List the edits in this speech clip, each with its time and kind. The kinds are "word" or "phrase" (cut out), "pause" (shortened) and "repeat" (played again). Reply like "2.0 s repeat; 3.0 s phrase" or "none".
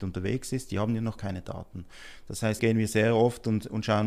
1.2 s word; 2.6 s word